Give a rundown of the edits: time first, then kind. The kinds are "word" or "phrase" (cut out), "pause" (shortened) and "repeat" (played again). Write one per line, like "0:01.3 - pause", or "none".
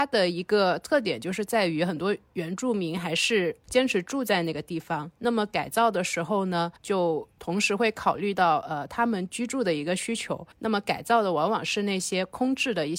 0:03.6 - pause
0:06.8 - pause
0:10.5 - pause